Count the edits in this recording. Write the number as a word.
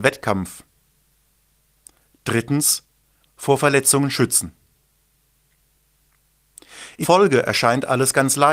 one